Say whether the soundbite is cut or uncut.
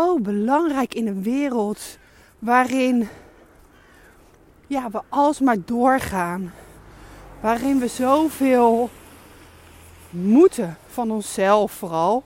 uncut